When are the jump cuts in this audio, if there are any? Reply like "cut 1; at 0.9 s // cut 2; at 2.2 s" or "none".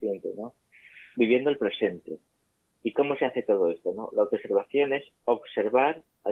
none